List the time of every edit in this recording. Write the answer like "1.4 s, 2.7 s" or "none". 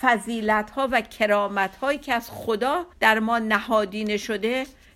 2.9 s